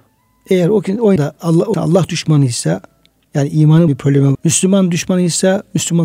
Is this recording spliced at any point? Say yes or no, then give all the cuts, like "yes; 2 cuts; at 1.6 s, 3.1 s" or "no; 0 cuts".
yes; 4 cuts; at 1.2 s, 1.7 s, 3.9 s, 4.3 s